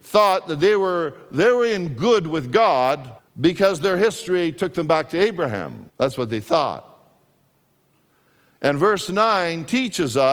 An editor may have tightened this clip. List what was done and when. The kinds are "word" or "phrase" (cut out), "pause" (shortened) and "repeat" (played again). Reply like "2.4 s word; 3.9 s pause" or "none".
3.2 s pause; 5.9 s pause

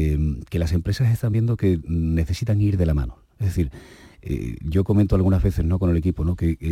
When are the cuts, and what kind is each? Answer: none

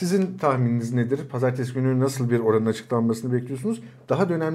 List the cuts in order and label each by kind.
none

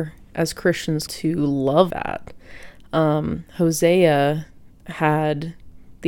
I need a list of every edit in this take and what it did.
1.1 s word; 1.9 s word

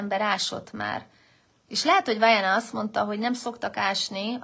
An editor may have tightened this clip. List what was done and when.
none

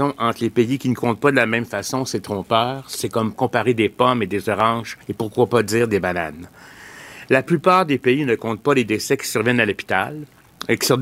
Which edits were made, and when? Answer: 5.0 s pause

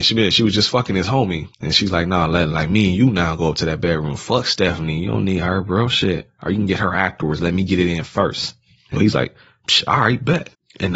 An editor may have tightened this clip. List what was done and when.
1.5 s pause; 9.0 s word

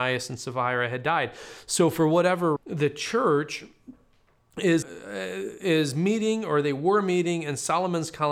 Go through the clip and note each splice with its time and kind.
2.6 s word; 4.8 s word

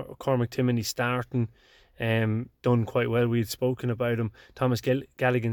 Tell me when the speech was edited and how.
none

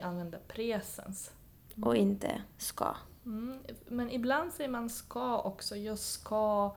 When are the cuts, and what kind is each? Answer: 2.5 s pause

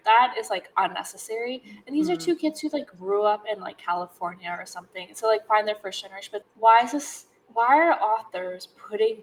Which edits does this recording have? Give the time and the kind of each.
6.4 s word

